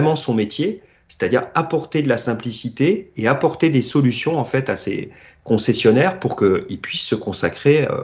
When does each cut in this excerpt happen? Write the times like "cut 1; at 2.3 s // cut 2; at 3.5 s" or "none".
none